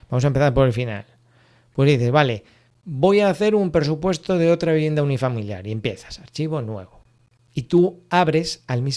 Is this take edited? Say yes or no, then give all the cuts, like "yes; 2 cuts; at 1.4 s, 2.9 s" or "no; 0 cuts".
no; 0 cuts